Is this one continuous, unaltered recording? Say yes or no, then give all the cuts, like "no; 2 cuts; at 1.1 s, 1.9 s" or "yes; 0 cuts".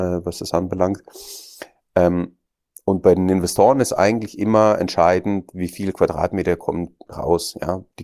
yes; 0 cuts